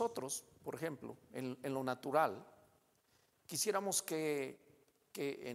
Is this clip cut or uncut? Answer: uncut